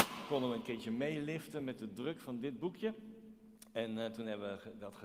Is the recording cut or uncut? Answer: uncut